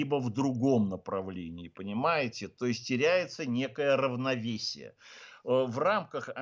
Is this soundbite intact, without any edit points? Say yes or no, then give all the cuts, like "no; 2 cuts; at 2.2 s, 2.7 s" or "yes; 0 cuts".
yes; 0 cuts